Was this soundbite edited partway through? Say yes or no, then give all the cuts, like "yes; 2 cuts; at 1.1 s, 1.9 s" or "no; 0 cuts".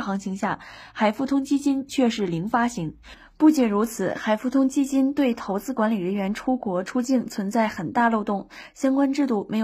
no; 0 cuts